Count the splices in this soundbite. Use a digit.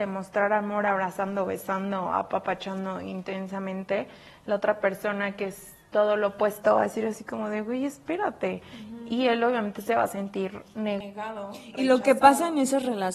0